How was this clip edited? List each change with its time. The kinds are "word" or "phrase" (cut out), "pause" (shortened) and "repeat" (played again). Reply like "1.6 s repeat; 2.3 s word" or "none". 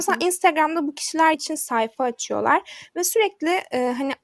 1.3 s word